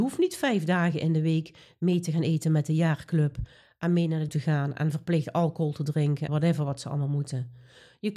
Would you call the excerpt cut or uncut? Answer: cut